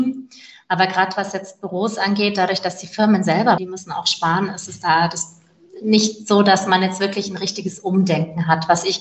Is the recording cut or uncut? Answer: cut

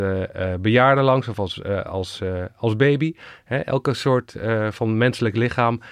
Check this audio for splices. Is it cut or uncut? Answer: uncut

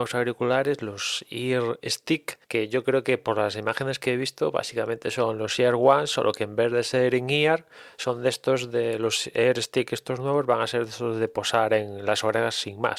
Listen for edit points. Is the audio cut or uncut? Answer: cut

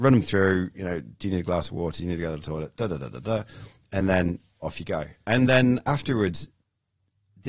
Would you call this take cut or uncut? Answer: uncut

